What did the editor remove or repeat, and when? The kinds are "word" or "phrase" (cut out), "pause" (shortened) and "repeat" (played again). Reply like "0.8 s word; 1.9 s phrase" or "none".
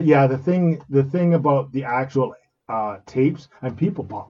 none

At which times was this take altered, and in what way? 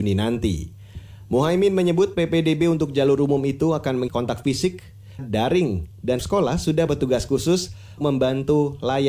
4.1 s word; 5.2 s phrase; 6.2 s word; 6.9 s word; 8.0 s word

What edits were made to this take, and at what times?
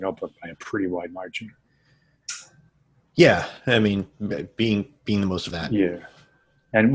5.5 s phrase

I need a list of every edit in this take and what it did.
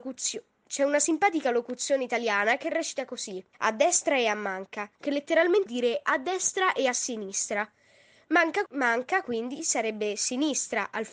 3.5 s pause; 4.9 s pause; 5.7 s word; 8.7 s word

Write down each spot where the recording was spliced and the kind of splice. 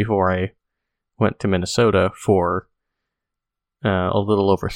1.4 s word

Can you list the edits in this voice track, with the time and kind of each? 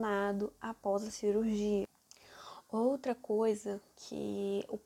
none

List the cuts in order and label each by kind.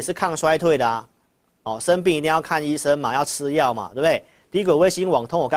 none

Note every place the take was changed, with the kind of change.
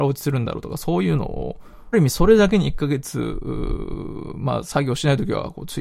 1.9 s phrase

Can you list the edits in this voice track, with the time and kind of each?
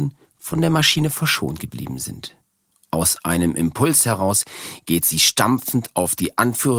2.7 s pause

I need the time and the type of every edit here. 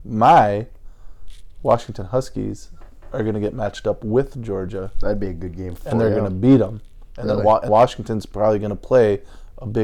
7.7 s word

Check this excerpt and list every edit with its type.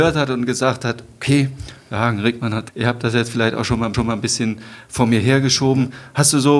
2.7 s word; 3.9 s repeat

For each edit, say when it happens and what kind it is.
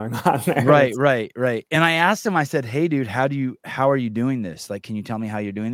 none

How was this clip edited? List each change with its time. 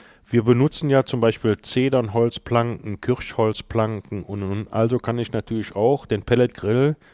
none

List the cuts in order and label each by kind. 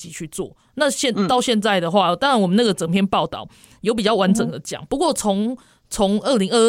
none

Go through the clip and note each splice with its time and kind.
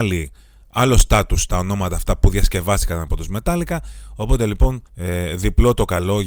1.5 s word; 4.9 s pause

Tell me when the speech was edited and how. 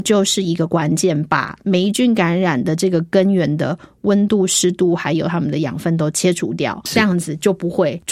none

